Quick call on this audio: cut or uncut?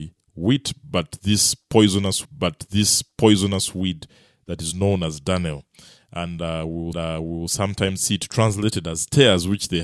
cut